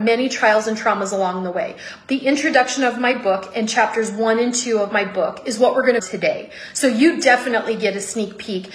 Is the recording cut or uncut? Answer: cut